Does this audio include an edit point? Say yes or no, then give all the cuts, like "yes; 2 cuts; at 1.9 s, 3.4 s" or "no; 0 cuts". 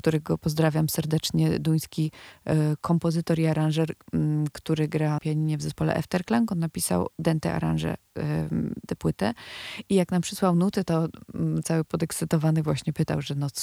yes; 2 cuts; at 5.2 s, 8.9 s